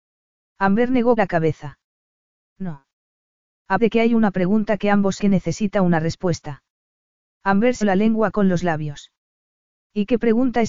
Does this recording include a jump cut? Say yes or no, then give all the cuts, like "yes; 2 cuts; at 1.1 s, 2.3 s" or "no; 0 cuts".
yes; 4 cuts; at 1.2 s, 3.8 s, 5.2 s, 7.8 s